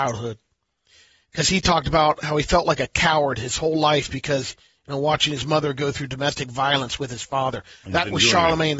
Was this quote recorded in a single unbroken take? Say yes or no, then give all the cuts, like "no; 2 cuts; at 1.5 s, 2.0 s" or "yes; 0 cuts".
yes; 0 cuts